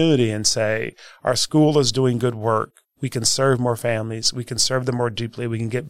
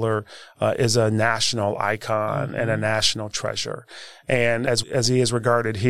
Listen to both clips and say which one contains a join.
second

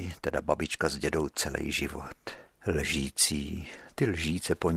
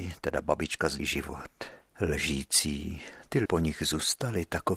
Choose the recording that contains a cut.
second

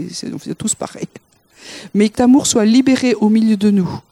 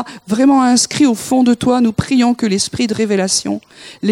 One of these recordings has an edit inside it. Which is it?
first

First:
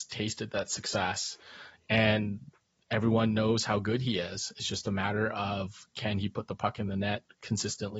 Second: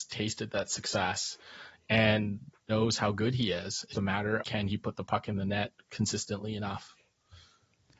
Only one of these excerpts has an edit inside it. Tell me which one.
second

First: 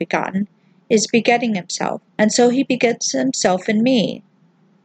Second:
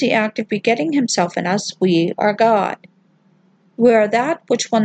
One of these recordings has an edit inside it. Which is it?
first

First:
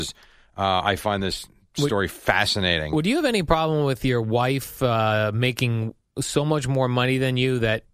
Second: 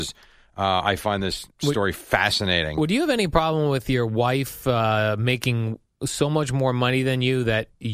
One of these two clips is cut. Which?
second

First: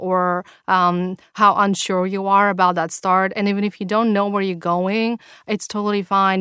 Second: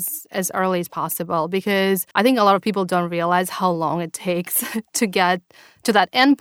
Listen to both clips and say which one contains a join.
second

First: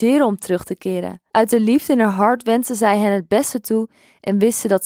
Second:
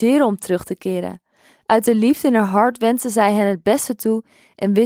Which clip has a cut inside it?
first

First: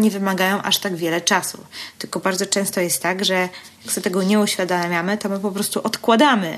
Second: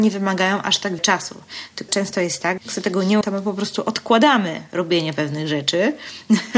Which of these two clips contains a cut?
second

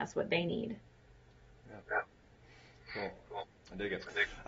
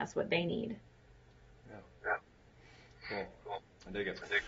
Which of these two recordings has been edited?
first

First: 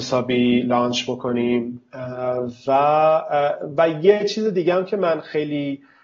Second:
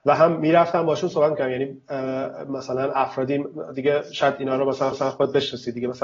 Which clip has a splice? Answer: second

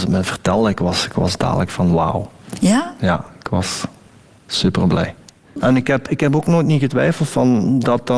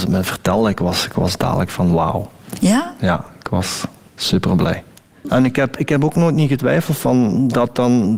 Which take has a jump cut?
second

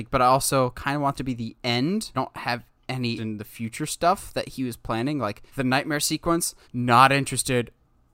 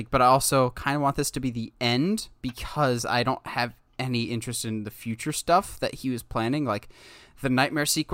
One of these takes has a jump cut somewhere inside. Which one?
first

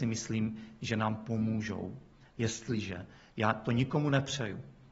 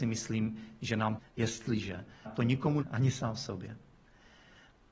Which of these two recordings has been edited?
second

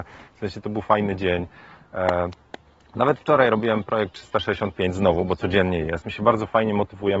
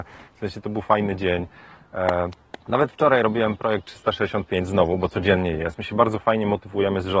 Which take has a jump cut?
second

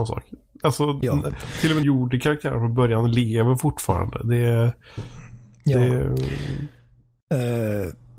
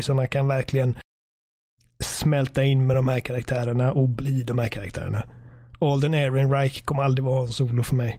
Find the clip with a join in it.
first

